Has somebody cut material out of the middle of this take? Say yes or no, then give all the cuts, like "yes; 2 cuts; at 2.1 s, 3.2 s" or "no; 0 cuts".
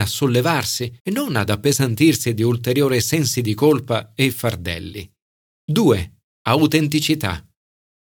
yes; 2 cuts; at 1.0 s, 5.3 s